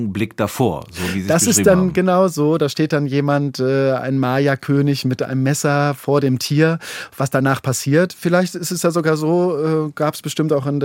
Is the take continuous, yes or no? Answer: yes